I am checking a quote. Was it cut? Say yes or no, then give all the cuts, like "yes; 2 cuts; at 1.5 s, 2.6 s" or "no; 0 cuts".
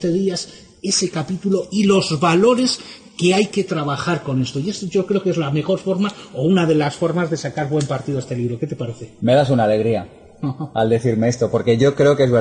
no; 0 cuts